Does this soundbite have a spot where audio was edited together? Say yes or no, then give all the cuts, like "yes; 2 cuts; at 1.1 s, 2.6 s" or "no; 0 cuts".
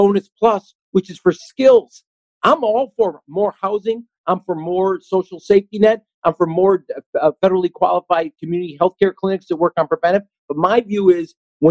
no; 0 cuts